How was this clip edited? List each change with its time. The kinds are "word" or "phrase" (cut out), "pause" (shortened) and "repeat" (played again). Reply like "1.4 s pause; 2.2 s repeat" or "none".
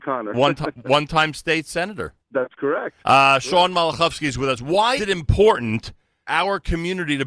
2.2 s pause; 3.0 s pause; 5.0 s word; 6.3 s word